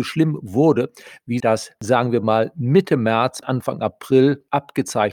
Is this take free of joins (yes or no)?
no